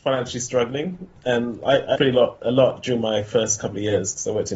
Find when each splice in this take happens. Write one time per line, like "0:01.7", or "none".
0:02.0